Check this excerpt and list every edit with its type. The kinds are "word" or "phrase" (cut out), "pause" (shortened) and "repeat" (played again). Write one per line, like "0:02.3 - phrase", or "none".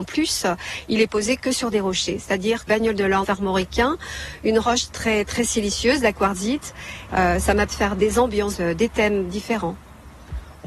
0:02.7 - word
0:03.2 - word
0:04.9 - word
0:07.7 - word
0:08.5 - word